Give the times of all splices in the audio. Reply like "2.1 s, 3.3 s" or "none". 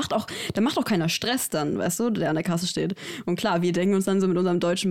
none